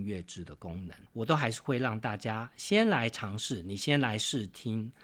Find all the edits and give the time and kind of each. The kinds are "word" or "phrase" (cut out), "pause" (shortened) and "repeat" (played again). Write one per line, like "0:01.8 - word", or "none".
0:01.1 - pause